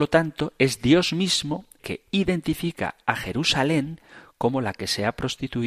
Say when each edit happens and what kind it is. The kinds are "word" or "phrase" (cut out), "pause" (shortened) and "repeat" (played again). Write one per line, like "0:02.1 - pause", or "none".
0:01.8 - word